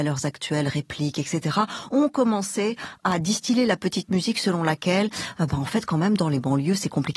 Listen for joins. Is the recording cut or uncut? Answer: uncut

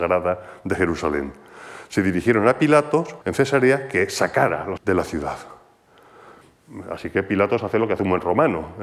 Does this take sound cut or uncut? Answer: cut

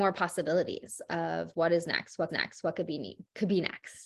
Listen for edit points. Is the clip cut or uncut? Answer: cut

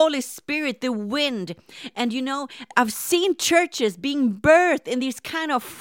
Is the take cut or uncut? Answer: uncut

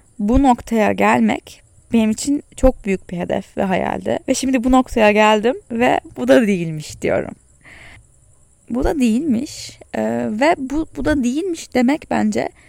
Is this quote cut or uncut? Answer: cut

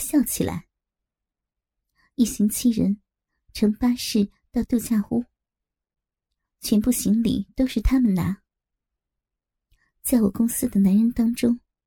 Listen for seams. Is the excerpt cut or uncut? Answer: uncut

